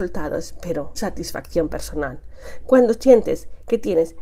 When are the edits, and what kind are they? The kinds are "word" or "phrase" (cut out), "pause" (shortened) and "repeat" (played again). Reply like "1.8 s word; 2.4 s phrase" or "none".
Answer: 1.0 s word

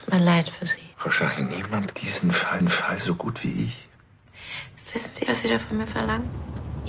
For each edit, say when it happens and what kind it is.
0.9 s pause; 1.9 s word; 2.6 s repeat; 5.3 s word

